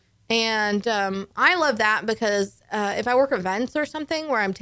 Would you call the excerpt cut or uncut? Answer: uncut